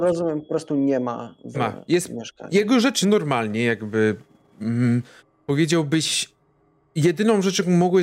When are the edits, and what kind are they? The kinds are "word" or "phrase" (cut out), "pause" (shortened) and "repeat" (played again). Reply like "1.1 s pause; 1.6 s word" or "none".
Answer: 1.5 s word; 3.0 s word; 5.2 s pause